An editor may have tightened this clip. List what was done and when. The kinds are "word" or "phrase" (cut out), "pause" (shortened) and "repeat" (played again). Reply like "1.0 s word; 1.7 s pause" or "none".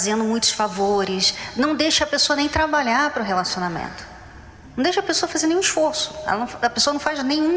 none